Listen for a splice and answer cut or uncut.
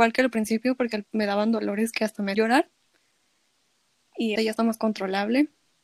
cut